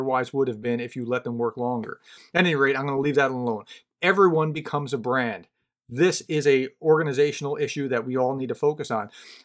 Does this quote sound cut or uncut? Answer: uncut